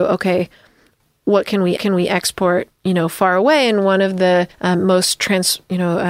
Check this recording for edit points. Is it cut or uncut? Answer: cut